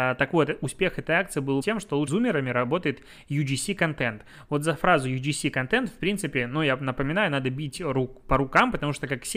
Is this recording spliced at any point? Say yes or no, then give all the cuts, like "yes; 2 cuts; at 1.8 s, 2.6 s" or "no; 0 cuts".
yes; 2 cuts; at 1.6 s, 2.1 s